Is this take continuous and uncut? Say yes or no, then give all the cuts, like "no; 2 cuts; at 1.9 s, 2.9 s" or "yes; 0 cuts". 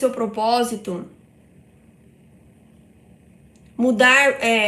yes; 0 cuts